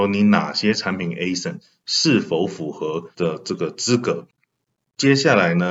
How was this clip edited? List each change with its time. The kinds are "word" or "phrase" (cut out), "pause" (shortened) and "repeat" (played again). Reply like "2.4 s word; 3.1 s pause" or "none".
3.1 s phrase